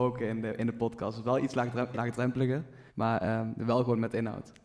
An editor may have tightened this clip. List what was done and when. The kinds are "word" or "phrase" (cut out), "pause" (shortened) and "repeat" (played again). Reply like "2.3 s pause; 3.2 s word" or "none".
1.9 s phrase; 2.9 s pause